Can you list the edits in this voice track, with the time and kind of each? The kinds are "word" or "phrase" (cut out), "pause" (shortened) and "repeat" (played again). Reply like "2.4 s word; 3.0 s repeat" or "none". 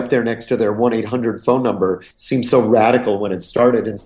2.1 s pause